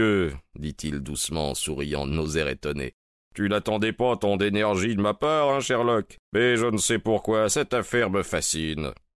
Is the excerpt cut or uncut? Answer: cut